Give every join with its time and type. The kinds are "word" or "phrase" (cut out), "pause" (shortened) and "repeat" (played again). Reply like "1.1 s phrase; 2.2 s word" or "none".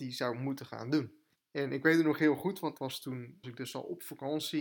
1.3 s pause; 2.8 s word; 3.4 s phrase